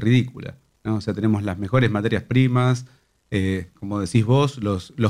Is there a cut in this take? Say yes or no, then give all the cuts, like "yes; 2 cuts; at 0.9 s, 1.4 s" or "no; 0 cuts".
no; 0 cuts